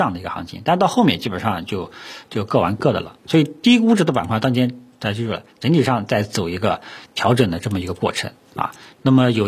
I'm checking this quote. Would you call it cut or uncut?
cut